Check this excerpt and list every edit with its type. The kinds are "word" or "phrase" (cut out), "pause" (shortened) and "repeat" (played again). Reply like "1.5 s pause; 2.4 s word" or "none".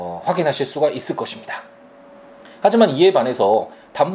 none